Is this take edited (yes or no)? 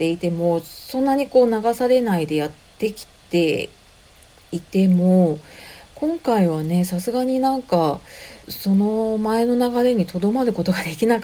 yes